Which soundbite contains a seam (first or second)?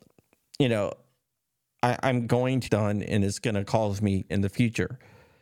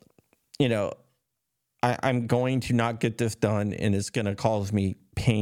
first